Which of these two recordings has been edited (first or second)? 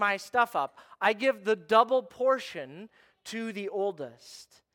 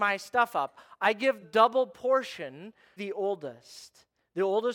second